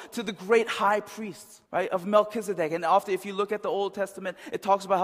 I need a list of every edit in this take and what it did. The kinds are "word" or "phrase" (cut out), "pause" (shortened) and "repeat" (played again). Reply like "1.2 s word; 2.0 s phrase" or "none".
1.6 s pause